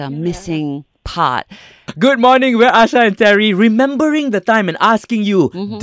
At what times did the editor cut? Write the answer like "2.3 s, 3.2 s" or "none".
none